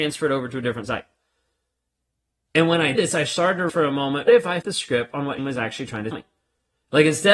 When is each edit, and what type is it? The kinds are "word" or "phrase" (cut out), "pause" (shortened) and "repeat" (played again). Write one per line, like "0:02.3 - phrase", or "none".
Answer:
0:03.0 - word
0:03.7 - word
0:04.3 - word
0:04.6 - word
0:05.4 - word
0:06.1 - word

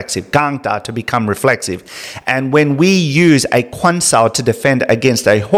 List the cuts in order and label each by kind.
none

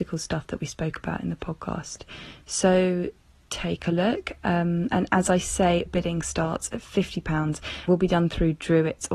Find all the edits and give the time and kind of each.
0:05.9 - word
0:07.9 - word

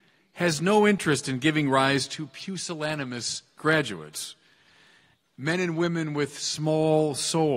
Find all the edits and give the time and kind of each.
none

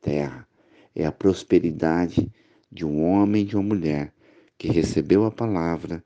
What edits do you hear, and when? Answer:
none

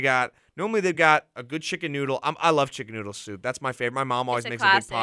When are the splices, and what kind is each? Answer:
none

